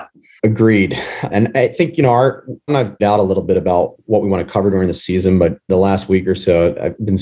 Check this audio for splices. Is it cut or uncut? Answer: cut